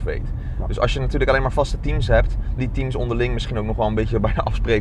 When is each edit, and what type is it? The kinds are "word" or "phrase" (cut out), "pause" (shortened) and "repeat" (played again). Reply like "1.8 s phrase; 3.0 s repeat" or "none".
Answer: 2.6 s word

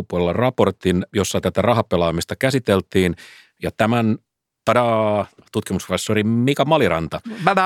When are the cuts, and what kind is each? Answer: 4.6 s phrase

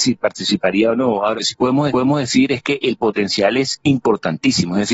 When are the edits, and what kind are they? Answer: 1.4 s word; 1.9 s repeat

